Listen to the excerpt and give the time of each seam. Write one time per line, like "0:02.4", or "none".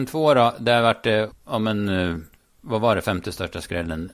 0:01.3